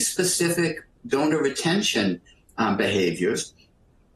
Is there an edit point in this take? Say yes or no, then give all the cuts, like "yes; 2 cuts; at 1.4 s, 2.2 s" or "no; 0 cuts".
no; 0 cuts